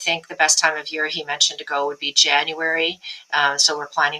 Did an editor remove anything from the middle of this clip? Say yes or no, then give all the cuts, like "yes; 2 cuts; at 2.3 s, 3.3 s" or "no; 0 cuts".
no; 0 cuts